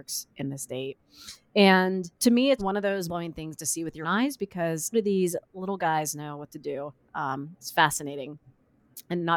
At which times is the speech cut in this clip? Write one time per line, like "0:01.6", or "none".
0:02.2
0:02.6
0:03.1
0:04.0
0:04.9